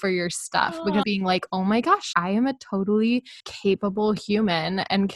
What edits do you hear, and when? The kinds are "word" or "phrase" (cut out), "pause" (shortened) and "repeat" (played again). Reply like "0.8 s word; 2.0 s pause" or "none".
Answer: 1.0 s phrase; 2.1 s word; 3.4 s pause